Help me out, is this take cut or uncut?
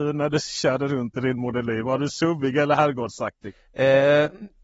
uncut